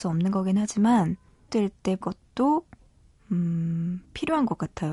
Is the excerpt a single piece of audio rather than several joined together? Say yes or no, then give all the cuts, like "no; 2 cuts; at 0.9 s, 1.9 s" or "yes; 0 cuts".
no; 2 cuts; at 1.5 s, 2.0 s